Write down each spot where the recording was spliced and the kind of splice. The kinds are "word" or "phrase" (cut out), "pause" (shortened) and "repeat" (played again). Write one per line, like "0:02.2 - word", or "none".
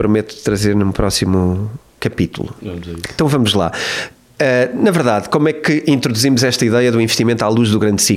none